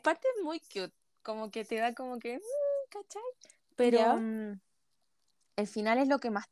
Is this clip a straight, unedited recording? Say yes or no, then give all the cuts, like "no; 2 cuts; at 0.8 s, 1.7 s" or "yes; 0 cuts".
yes; 0 cuts